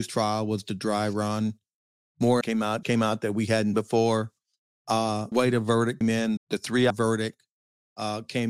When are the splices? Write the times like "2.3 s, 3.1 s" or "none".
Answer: 2.4 s, 2.8 s, 3.7 s, 5.3 s, 6.0 s, 6.4 s, 6.9 s